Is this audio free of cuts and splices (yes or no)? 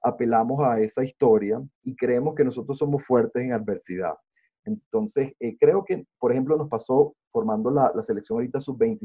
no